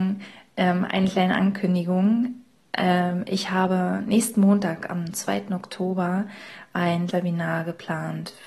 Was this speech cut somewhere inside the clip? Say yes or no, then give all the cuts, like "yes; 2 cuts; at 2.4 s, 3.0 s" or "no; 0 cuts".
yes; 1 cut; at 7.1 s